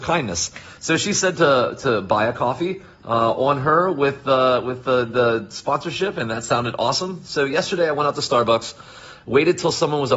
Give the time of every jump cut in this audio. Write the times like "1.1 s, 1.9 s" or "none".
none